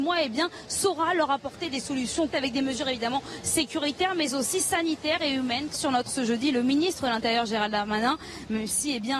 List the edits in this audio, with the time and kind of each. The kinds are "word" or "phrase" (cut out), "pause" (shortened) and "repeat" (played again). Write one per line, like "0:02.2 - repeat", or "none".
0:02.3 - word
0:05.7 - phrase
0:06.1 - word